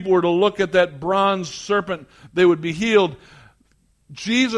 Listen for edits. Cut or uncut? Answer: uncut